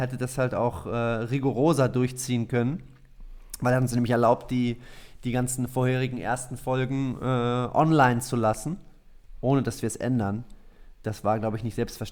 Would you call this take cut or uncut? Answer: uncut